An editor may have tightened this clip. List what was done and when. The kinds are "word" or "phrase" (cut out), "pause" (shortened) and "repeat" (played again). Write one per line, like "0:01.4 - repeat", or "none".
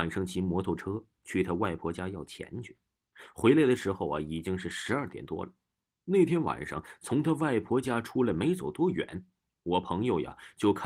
none